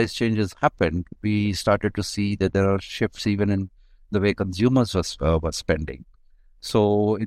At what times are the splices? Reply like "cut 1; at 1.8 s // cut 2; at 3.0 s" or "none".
none